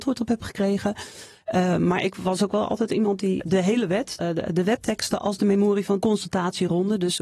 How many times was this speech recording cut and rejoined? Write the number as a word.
three